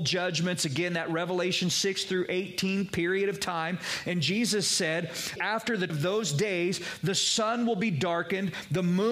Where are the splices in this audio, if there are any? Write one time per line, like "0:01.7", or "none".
0:05.4
0:05.9